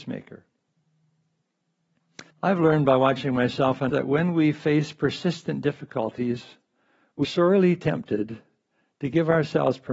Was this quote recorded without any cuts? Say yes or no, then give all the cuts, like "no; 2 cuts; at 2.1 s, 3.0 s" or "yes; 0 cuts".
no; 3 cuts; at 2.3 s, 3.9 s, 7.2 s